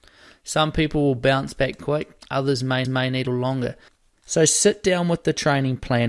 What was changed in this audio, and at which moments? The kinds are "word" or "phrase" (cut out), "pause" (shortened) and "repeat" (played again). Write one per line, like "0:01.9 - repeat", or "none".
0:01.8 - word
0:02.8 - repeat
0:03.3 - word